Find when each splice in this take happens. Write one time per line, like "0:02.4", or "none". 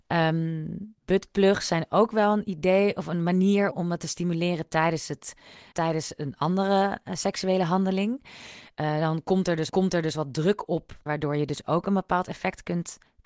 0:01.0
0:03.7
0:05.7
0:09.7
0:11.1